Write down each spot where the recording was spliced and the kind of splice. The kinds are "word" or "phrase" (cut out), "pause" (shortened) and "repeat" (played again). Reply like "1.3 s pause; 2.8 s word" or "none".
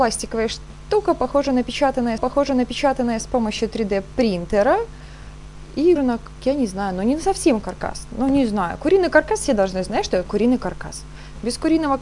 2.2 s repeat; 6.0 s word; 7.6 s word; 10.3 s word

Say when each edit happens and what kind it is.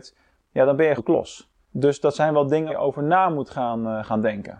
1.0 s word; 1.6 s pause; 2.7 s word

